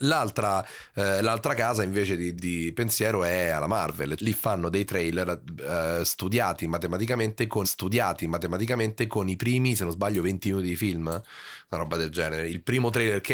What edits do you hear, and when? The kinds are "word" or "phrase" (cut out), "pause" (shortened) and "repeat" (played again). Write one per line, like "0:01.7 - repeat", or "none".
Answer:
0:02.4 - word
0:04.2 - word
0:07.6 - repeat